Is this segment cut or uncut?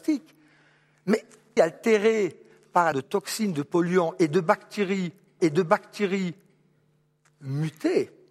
cut